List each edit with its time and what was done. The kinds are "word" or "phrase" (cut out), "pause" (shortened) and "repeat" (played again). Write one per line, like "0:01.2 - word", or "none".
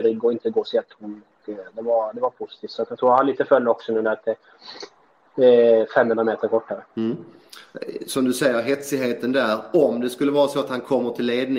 0:06.9 - pause